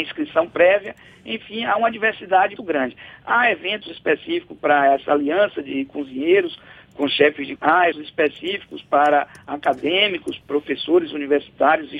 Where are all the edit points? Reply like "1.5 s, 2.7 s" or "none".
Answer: 2.6 s, 7.6 s, 7.9 s, 10.4 s